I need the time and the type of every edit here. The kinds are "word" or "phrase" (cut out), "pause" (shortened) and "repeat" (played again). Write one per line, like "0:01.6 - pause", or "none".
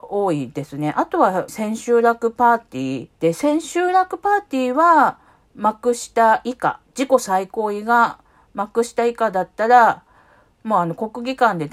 0:01.5 - phrase
0:03.1 - pause